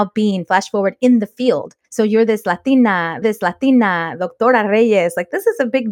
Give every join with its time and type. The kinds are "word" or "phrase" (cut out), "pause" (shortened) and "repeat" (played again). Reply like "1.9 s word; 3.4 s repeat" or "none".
1.8 s pause; 3.2 s repeat